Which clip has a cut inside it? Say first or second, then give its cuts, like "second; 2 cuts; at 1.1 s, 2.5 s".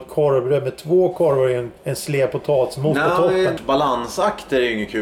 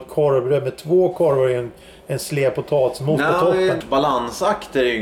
first; 1 cut; at 1.8 s